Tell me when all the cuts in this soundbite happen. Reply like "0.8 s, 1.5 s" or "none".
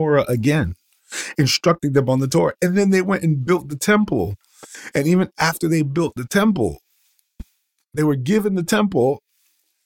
none